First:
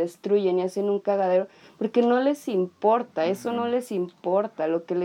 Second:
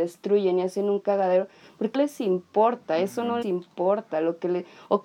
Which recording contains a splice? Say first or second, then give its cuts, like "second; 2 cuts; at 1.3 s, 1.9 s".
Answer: second; 2 cuts; at 1.9 s, 3.4 s